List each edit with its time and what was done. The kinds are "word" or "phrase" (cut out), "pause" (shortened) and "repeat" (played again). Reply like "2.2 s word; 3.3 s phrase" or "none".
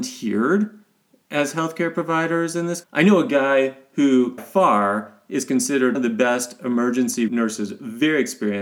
2.8 s word; 4.4 s word; 5.9 s word; 7.3 s word

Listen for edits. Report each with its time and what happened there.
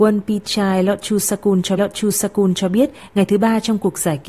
1.8 s repeat

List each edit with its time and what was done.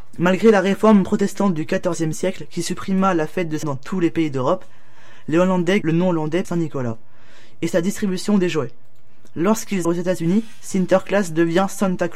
3.6 s word; 5.8 s phrase; 6.4 s word; 9.8 s word

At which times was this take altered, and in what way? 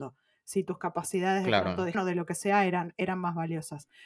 1.9 s word

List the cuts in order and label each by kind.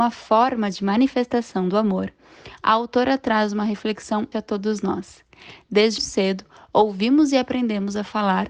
4.3 s word; 6.0 s word

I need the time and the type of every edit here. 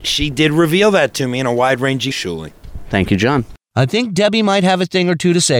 2.1 s word

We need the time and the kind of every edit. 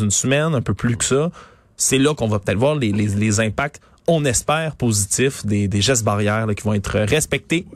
none

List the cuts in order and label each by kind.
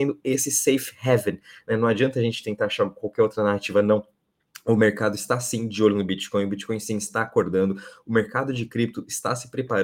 none

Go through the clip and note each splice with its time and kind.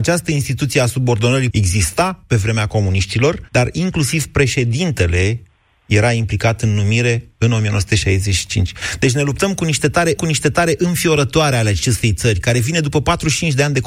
1.5 s word; 3.5 s pause; 10.2 s repeat

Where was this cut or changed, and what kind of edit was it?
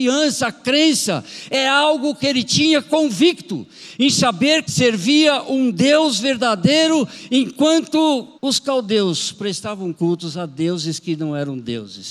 4.6 s phrase; 8.4 s pause; 9.9 s word

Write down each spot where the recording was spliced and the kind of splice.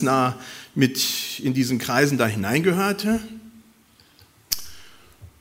none

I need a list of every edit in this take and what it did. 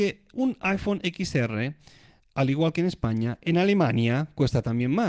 none

